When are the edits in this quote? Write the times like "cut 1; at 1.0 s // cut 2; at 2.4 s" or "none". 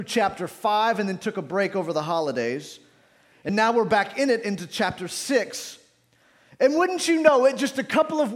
none